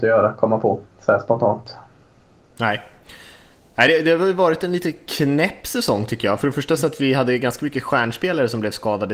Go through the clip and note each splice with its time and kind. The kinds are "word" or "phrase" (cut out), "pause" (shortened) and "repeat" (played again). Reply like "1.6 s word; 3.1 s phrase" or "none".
none